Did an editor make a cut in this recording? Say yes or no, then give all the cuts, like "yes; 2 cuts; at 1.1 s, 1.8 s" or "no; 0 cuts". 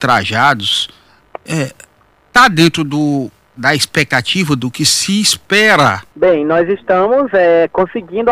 yes; 2 cuts; at 3.6 s, 6.1 s